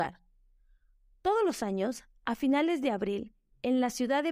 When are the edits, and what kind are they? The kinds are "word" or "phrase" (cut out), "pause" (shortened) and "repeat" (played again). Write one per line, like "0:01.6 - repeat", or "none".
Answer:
none